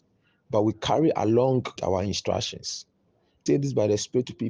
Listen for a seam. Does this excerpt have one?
yes; 2 cuts; at 1.8 s, 3.5 s

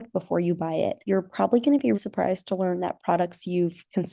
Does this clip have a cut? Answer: yes; 2 cuts; at 1.0 s, 1.9 s

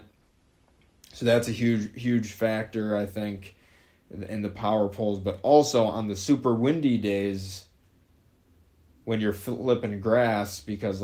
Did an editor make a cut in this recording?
no; 0 cuts

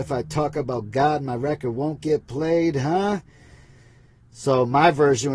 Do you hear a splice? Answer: no; 0 cuts

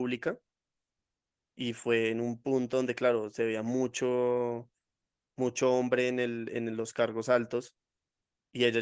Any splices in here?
no; 0 cuts

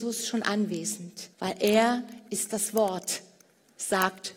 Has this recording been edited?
yes; 1 cut; at 1.3 s

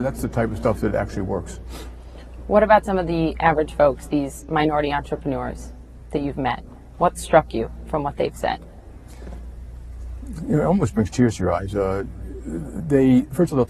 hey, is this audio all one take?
yes; 0 cuts

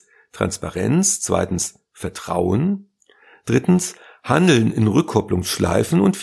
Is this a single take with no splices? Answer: yes; 0 cuts

